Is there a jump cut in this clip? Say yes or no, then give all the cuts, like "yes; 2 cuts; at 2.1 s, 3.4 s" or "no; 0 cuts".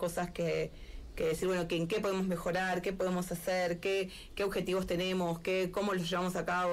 no; 0 cuts